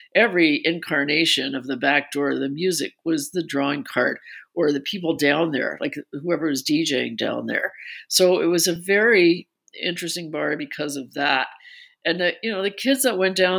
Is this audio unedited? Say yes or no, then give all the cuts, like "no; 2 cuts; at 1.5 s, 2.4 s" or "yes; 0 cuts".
yes; 0 cuts